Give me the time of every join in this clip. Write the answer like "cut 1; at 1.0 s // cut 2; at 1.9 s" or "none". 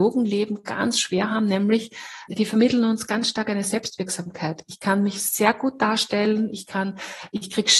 cut 1; at 2.3 s